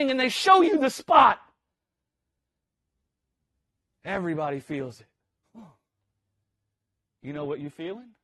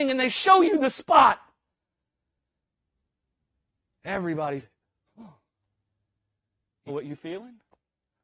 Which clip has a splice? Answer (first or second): second